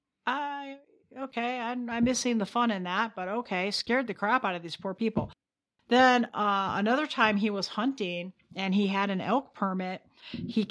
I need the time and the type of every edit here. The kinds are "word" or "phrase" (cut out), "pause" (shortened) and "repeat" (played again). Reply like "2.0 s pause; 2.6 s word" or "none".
none